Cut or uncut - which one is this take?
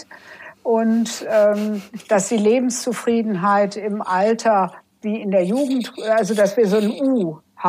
uncut